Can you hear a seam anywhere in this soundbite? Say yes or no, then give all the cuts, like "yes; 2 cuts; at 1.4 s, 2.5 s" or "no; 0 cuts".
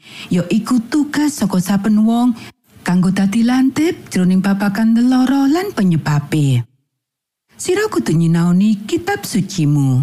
no; 0 cuts